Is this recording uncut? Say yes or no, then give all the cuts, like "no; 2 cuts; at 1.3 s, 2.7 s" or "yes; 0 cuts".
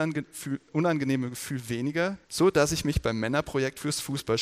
no; 1 cut; at 2.2 s